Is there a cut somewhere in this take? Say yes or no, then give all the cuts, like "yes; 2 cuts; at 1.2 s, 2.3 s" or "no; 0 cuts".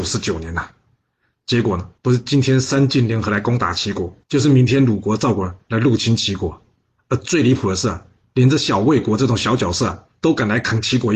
yes; 2 cuts; at 2.0 s, 4.2 s